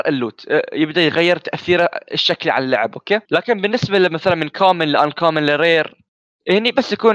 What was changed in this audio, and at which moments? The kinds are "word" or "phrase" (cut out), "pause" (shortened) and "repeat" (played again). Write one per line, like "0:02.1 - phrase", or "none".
0:03.2 - pause